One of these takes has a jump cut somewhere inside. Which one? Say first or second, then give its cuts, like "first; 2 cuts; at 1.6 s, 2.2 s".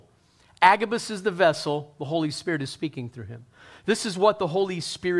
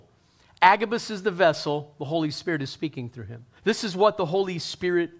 second; 1 cut; at 3.6 s